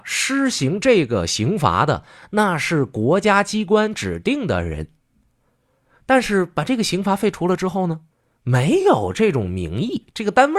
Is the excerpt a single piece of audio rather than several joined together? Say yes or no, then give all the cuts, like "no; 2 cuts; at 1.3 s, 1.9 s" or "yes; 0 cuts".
no; 1 cut; at 8.1 s